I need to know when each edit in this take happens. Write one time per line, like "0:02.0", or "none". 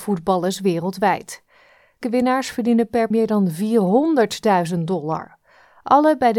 0:02.0
0:03.1